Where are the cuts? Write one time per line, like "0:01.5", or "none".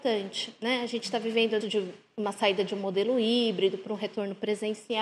0:01.6